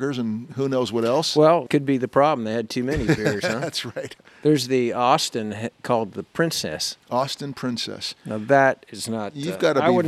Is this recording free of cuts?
no; 3 cuts; at 1.7 s, 4.3 s, 7.0 s

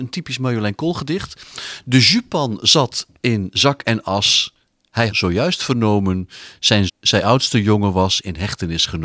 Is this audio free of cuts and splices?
no; 2 cuts; at 5.1 s, 6.9 s

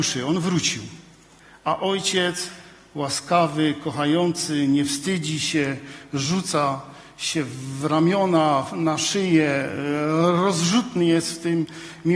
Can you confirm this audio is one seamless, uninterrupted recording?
yes; 0 cuts

